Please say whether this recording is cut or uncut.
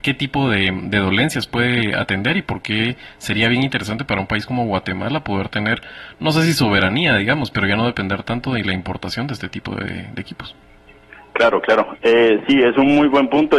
uncut